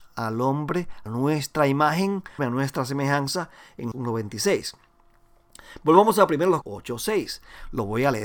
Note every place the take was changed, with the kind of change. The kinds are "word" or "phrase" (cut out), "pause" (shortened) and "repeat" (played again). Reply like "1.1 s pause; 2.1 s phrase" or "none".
1.1 s word; 2.4 s word; 3.9 s word; 6.6 s word